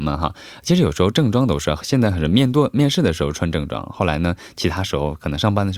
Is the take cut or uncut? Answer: uncut